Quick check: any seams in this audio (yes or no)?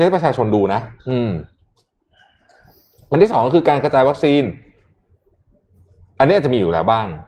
yes